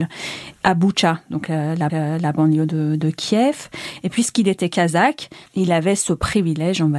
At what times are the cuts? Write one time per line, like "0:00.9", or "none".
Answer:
0:01.9
0:05.5